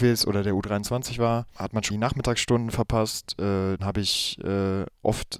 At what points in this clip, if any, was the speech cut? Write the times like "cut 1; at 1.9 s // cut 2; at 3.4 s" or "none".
cut 1; at 1.9 s // cut 2; at 3.8 s